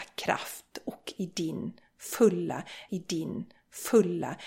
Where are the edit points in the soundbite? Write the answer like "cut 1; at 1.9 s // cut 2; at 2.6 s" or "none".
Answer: cut 1; at 2.9 s